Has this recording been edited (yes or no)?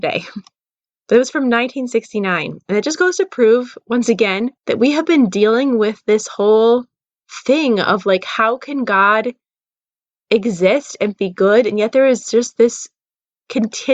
yes